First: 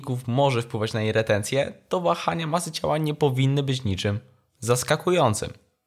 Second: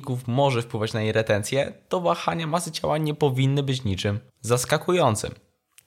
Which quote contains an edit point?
second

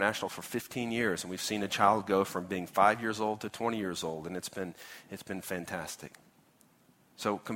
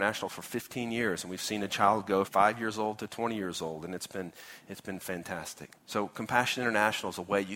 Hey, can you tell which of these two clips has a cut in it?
second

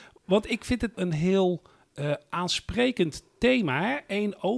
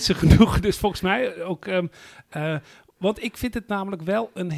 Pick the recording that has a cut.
first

